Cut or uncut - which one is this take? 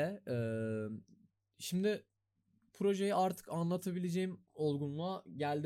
uncut